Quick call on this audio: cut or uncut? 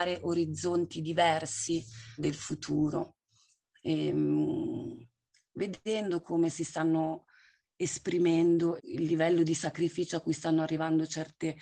cut